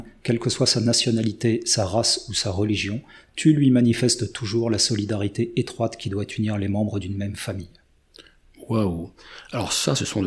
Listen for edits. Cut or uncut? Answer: uncut